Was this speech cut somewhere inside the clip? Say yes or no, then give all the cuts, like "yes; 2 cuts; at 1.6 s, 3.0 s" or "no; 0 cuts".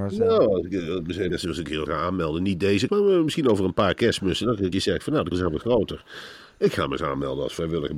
yes; 5 cuts; at 1.3 s, 1.9 s, 2.9 s, 4.7 s, 5.3 s